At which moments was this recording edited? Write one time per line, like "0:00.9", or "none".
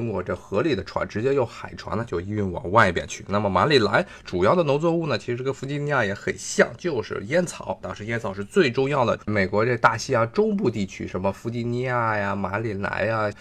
0:09.2